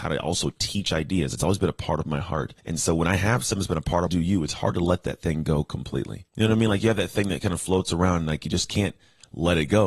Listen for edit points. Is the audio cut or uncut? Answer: cut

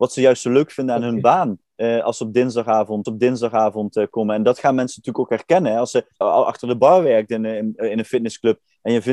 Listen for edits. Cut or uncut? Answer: cut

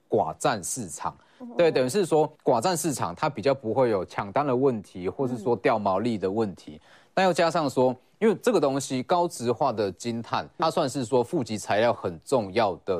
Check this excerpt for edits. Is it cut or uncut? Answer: cut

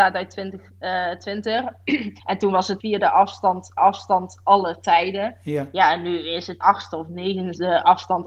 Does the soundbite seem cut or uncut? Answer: cut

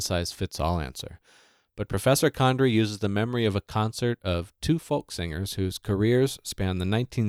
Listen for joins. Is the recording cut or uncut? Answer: uncut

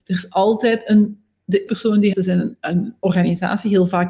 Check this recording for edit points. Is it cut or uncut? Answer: cut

